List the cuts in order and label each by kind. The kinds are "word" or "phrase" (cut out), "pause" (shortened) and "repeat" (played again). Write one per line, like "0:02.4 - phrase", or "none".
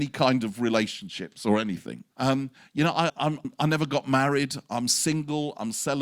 0:02.1 - pause
0:03.1 - word
0:03.4 - word